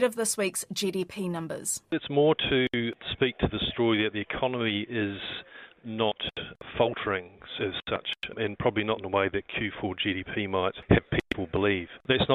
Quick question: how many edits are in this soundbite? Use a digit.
1